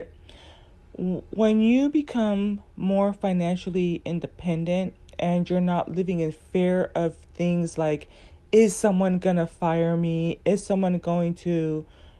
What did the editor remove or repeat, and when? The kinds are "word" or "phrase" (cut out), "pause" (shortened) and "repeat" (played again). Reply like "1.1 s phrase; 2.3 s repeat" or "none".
none

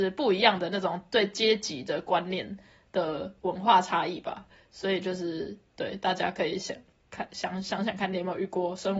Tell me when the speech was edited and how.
none

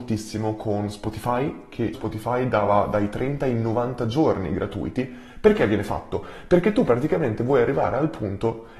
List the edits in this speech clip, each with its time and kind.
1.9 s word

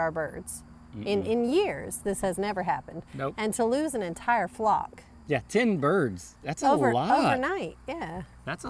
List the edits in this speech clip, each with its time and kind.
none

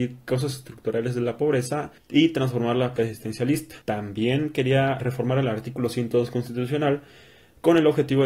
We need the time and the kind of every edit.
2.0 s pause; 3.0 s word; 3.8 s pause; 5.0 s word

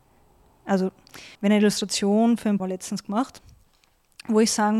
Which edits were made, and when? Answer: 1.4 s pause; 2.6 s word

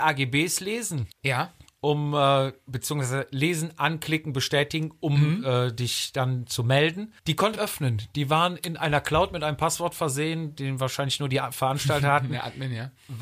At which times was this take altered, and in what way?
1.1 s pause; 7.2 s pause; 7.6 s phrase

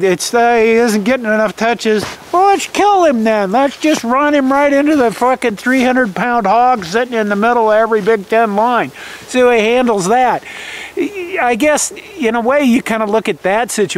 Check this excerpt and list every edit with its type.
none

